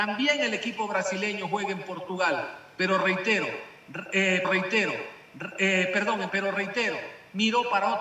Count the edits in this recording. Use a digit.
2